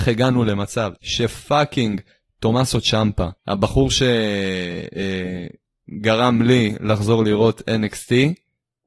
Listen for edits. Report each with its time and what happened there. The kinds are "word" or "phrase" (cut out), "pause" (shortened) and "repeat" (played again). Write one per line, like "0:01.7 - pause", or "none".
0:00.9 - pause
0:03.4 - pause